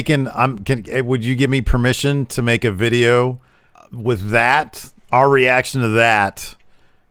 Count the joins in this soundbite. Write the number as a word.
one